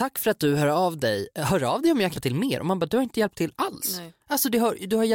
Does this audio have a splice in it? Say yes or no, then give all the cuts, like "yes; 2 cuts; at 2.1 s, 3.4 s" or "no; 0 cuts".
yes; 1 cut; at 2.1 s